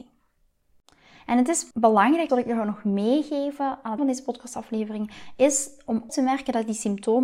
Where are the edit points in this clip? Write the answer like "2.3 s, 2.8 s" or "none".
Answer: 1.7 s, 2.3 s, 4.0 s, 6.1 s